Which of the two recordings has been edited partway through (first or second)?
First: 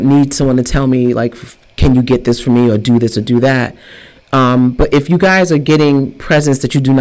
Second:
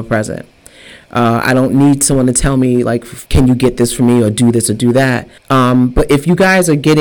second